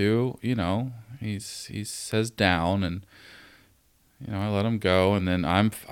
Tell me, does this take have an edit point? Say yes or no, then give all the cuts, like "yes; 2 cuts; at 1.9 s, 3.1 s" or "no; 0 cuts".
no; 0 cuts